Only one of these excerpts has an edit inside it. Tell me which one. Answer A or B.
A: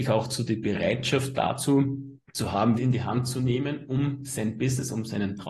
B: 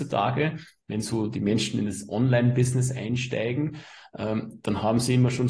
A